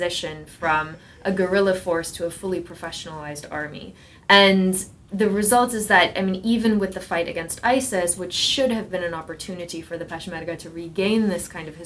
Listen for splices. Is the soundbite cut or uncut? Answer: uncut